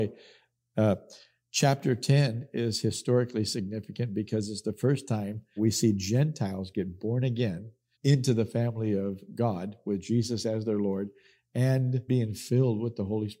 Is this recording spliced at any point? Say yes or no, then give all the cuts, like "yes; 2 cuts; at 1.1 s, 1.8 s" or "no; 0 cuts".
yes; 3 cuts; at 5.6 s, 7.9 s, 12.1 s